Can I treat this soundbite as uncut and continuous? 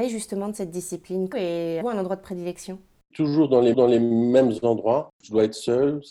no; 4 cuts; at 1.3 s, 1.8 s, 3.1 s, 3.7 s

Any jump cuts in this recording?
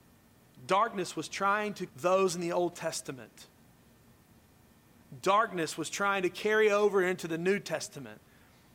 yes; 1 cut; at 1.9 s

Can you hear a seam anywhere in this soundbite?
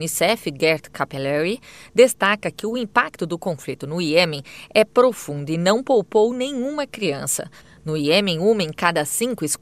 no; 0 cuts

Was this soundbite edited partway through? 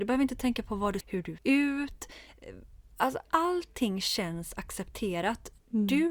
yes; 3 cuts; at 1.0 s, 1.4 s, 3.2 s

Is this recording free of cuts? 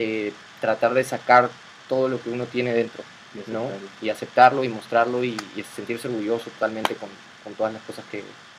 yes; 0 cuts

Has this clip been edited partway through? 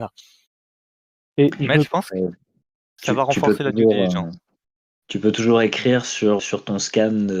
yes; 1 cut; at 6.4 s

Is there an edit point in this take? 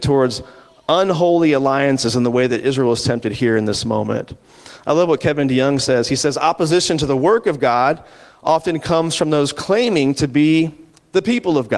no; 0 cuts

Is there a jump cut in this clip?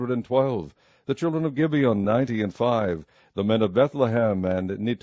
no; 0 cuts

